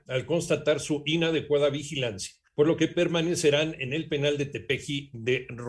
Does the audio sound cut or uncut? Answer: uncut